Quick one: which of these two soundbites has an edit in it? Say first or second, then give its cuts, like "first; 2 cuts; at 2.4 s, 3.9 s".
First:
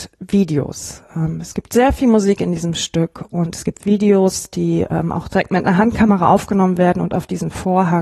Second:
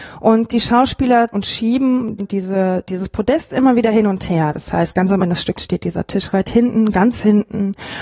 second; 5 cuts; at 1.3 s, 2.2 s, 5.2 s, 5.5 s, 6.3 s